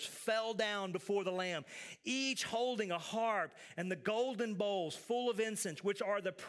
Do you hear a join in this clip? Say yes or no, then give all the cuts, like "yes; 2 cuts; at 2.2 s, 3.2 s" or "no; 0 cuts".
no; 0 cuts